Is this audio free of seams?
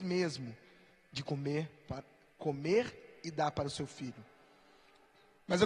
yes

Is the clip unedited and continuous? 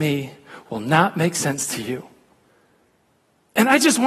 yes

